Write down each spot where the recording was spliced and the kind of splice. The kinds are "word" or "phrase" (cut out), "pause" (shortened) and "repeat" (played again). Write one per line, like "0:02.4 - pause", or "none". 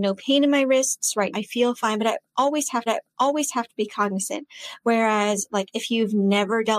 0:01.3 - word
0:02.9 - repeat